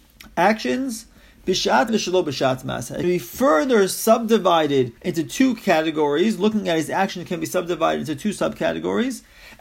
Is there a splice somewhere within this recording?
yes; 3 cuts; at 1.9 s, 3.0 s, 5.0 s

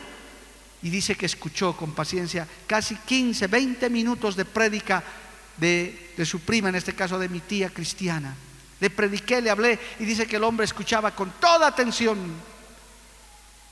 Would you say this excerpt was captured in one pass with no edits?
yes; 0 cuts

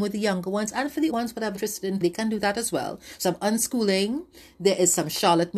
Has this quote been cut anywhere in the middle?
yes; 4 cuts; at 1.1 s, 1.5 s, 2.0 s, 3.2 s

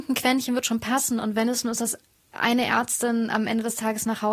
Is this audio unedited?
yes; 0 cuts

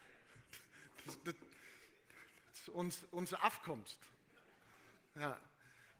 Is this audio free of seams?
yes; 0 cuts

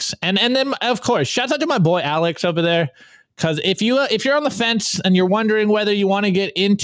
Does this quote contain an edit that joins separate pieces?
no; 0 cuts

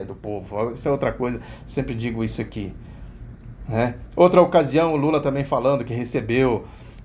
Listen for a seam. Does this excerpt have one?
no; 0 cuts

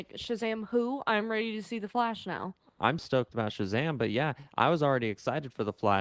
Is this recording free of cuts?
no; 1 cut; at 3.0 s

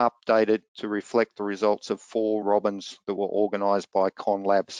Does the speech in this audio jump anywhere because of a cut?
yes; 1 cut; at 2.4 s

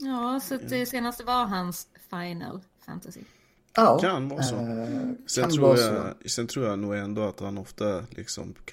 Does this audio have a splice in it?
no; 0 cuts

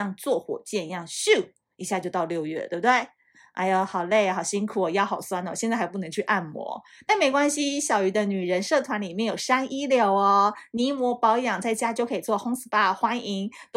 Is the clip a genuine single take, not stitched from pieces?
yes; 0 cuts

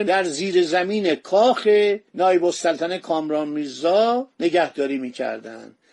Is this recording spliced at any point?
yes; 2 cuts; at 2.1 s, 4.3 s

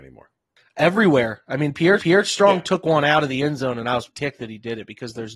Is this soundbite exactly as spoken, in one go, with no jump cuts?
no; 2 cuts; at 2.0 s, 4.1 s

